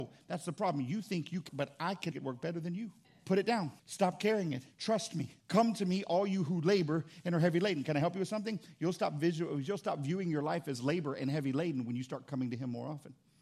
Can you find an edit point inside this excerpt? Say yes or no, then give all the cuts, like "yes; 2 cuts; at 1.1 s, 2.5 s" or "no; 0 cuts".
yes; 6 cuts; at 1.5 s, 2.1 s, 3.0 s, 3.8 s, 4.7 s, 5.4 s